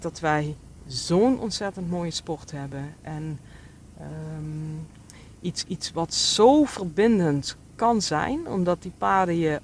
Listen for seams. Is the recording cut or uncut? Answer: uncut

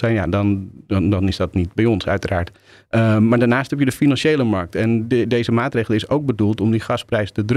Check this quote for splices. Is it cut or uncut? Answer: uncut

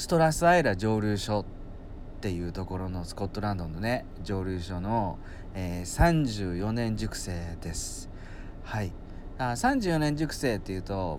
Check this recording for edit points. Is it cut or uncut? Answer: uncut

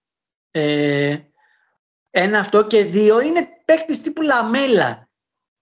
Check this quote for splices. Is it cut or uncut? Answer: uncut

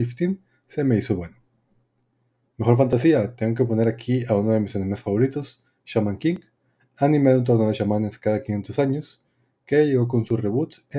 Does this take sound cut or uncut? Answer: uncut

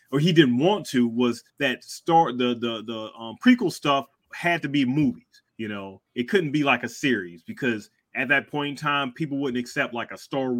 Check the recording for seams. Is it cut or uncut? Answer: cut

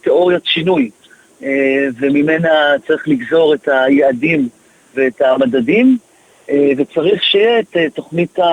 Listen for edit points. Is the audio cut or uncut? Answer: uncut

